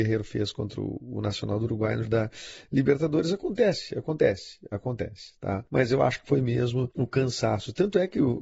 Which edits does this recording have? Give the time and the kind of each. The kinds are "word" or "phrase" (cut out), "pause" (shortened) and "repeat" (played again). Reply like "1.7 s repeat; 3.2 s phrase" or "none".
2.0 s phrase